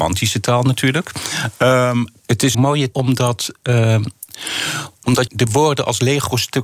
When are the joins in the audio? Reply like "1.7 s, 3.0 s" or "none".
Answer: 2.2 s, 2.5 s, 2.9 s, 5.3 s